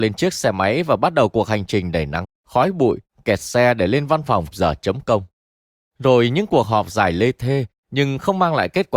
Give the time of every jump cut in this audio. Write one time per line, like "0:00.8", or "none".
0:02.2
0:04.5